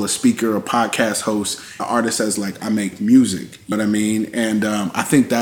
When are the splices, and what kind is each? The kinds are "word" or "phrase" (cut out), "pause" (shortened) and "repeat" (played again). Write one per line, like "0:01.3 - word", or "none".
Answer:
0:01.8 - word
0:03.7 - word